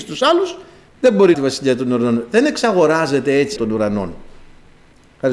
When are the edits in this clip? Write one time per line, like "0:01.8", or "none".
0:01.3
0:03.6